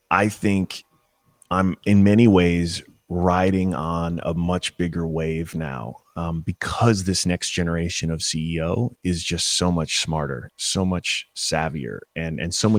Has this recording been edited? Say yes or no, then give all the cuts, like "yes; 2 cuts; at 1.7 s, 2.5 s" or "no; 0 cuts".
no; 0 cuts